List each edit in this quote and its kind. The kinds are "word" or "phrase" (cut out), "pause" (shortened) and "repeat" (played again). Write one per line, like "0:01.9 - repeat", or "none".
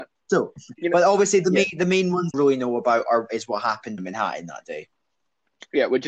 0:02.3 - word
0:04.0 - phrase